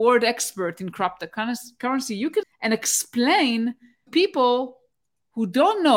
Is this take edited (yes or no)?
yes